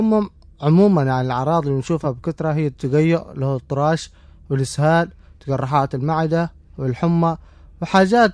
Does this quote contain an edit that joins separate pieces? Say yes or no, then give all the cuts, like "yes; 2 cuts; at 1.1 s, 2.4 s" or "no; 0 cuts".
no; 0 cuts